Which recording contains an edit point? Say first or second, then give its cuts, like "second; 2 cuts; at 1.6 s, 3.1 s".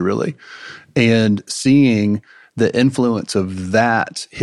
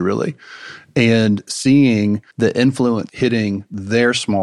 second; 2 cuts; at 2.3 s, 3.1 s